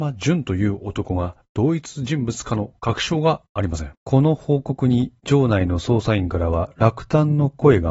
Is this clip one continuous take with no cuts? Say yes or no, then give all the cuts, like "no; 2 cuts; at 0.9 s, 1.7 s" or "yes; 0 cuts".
no; 1 cut; at 3.9 s